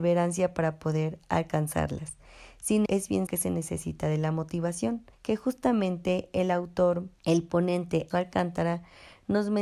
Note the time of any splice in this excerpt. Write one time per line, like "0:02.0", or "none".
0:02.9
0:03.3
0:05.1
0:07.2
0:08.1